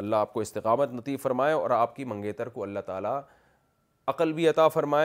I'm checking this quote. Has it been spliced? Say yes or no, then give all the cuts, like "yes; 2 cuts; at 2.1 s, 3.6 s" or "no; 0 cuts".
no; 0 cuts